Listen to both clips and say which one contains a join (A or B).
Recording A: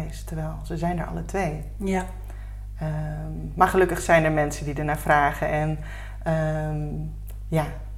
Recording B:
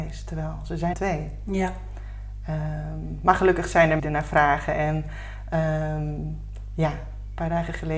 B